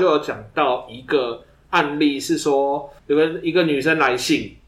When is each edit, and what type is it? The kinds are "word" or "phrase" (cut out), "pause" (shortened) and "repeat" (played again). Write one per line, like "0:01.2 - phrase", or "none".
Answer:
0:03.0 - pause

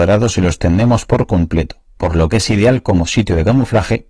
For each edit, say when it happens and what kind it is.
none

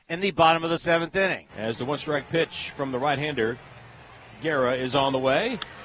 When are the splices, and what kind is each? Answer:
0:01.5 - pause

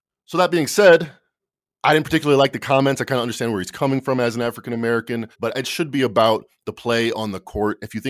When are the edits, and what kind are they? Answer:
0:01.6 - pause
0:05.3 - pause

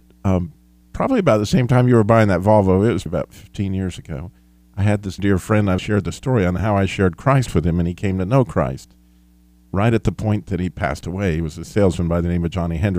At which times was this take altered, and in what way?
0:03.1 - word
0:05.2 - word
0:05.8 - word

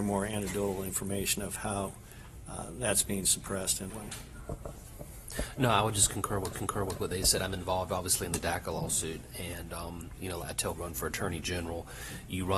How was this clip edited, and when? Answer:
0:03.9 - phrase
0:06.5 - repeat
0:10.4 - word
0:10.7 - phrase

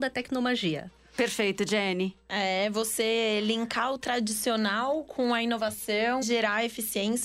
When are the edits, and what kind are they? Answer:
0:06.2 - word

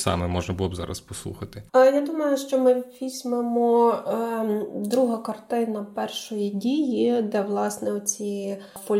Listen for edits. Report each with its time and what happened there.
0:01.7 - pause

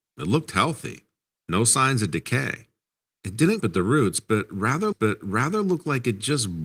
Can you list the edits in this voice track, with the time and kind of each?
0:03.6 - phrase
0:04.9 - repeat

